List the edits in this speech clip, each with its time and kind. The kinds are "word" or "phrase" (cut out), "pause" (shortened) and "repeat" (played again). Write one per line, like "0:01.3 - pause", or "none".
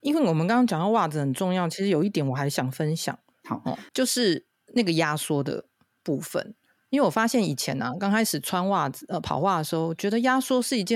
none